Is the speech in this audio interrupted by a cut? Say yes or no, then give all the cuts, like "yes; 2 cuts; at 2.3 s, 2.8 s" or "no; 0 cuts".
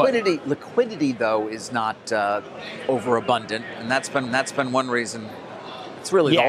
yes; 1 cut; at 4.3 s